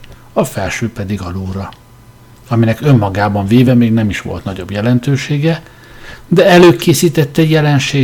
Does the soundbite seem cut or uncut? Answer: uncut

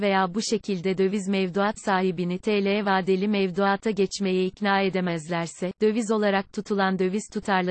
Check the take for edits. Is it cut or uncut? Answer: uncut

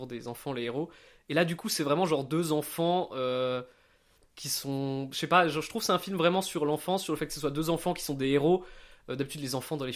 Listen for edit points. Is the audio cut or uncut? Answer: uncut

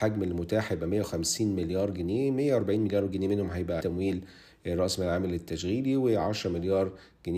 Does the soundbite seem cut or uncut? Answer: cut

